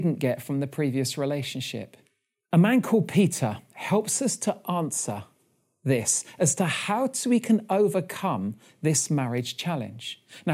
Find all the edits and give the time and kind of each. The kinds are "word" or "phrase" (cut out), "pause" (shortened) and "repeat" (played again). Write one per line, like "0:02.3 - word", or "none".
none